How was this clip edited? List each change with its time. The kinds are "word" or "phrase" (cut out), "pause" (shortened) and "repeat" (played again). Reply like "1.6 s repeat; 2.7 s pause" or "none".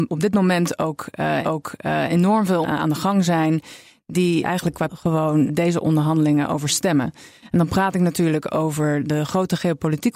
1.4 s repeat; 2.6 s word; 4.4 s word; 4.9 s word; 5.5 s word